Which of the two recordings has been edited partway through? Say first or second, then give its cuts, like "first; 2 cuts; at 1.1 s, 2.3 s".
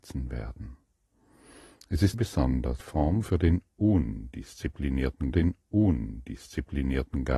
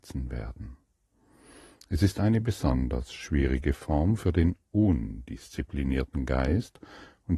first; 3 cuts; at 2.1 s, 2.8 s, 5.3 s